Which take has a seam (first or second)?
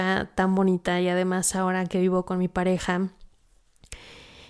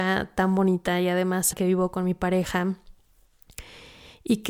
second